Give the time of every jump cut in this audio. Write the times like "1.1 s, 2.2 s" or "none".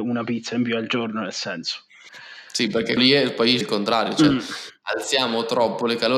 3.0 s, 3.6 s